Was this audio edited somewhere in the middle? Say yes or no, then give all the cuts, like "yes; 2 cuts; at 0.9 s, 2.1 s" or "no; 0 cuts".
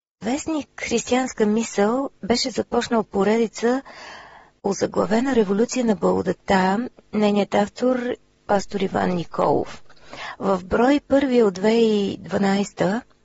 no; 0 cuts